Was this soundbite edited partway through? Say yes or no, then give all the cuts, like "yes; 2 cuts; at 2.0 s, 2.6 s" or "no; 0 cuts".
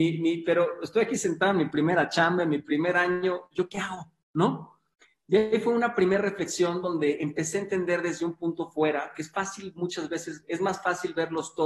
no; 0 cuts